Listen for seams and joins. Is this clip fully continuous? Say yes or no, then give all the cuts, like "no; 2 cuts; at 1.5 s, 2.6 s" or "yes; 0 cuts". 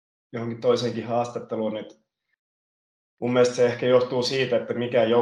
yes; 0 cuts